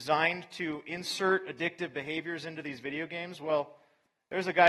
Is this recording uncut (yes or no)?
yes